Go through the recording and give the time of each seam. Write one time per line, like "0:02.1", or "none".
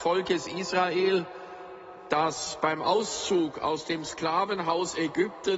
none